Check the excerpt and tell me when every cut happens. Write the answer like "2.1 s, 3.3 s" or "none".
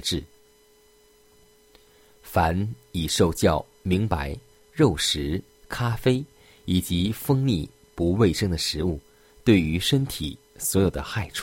5.6 s